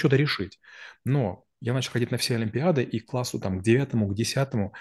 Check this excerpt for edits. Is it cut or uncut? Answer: uncut